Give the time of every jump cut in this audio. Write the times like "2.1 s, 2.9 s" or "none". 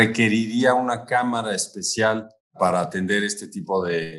2.4 s